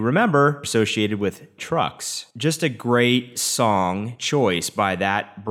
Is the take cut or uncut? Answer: cut